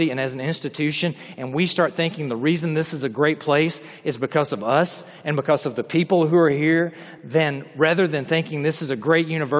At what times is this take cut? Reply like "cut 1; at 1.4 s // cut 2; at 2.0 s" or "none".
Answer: none